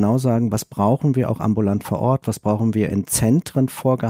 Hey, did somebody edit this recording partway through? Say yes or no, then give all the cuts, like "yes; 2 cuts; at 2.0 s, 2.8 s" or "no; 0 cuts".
no; 0 cuts